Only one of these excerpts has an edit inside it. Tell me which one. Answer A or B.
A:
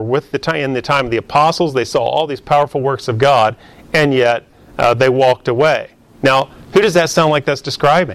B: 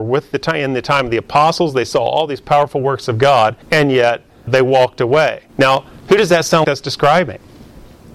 B